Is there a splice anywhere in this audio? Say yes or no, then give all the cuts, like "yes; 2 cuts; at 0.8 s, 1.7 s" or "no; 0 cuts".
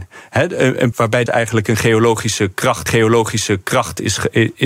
yes; 3 cuts; at 0.9 s, 1.3 s, 2.9 s